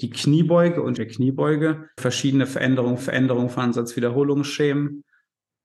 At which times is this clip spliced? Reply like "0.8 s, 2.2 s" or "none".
1.0 s, 2.0 s, 3.0 s